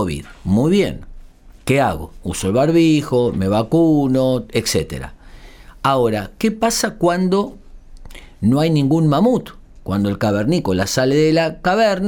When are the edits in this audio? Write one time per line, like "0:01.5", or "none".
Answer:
0:01.6